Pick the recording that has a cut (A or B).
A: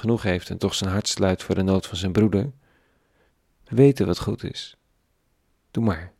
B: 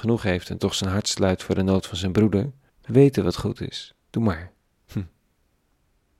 B